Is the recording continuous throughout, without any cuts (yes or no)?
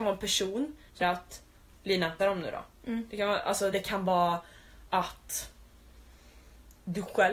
no